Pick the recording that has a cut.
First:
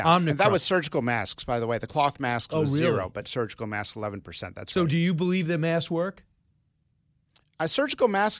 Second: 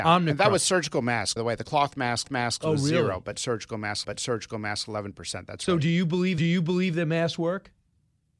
second; 4 cuts; at 1.4 s, 2.2 s, 4.0 s, 6.4 s

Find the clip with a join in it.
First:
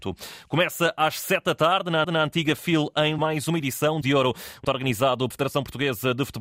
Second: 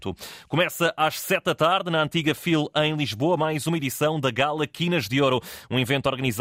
first; 5 cuts; at 2.0 s, 3.2 s, 4.0 s, 4.6 s, 5.3 s

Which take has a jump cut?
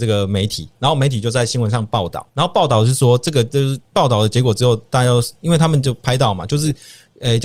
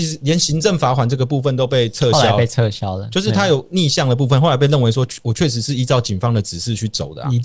first; 1 cut; at 2.3 s

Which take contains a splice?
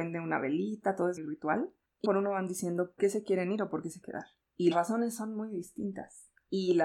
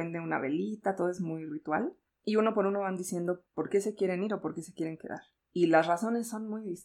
first; 5 cuts; at 1.2 s, 2.0 s, 3.0 s, 4.0 s, 4.7 s

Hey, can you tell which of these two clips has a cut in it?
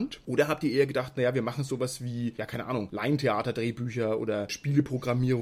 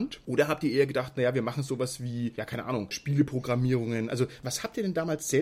second; 1 cut; at 2.9 s

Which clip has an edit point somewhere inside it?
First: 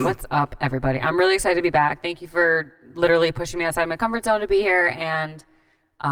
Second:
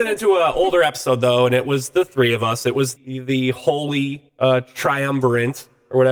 second; 2 cuts; at 3.0 s, 4.3 s

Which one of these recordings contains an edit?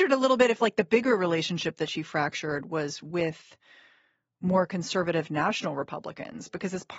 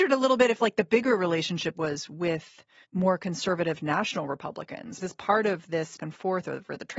second; 4 cuts; at 1.7 s, 2.8 s, 5.0 s, 6.0 s

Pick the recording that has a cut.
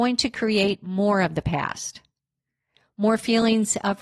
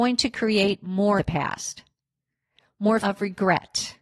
second; 2 cuts; at 1.2 s, 3.0 s

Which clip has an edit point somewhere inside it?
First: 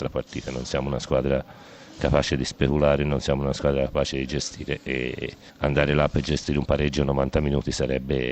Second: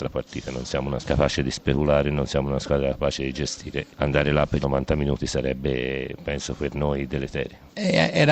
second; 3 cuts; at 1.0 s, 3.9 s, 4.6 s

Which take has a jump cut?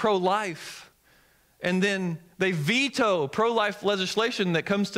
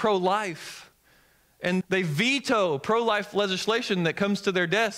second; 1 cut; at 1.8 s

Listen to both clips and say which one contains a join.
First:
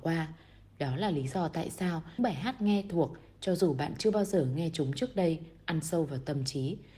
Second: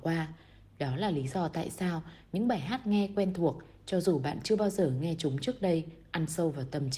first; 2 cuts; at 2.2 s, 2.9 s

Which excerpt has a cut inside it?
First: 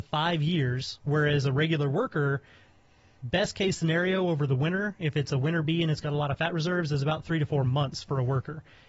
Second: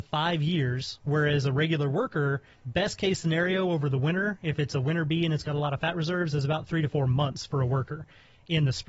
second; 1 cut; at 2.5 s

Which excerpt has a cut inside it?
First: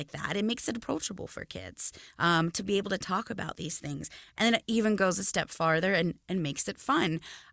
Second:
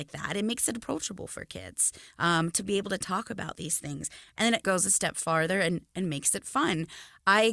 second; 1 cut; at 4.6 s

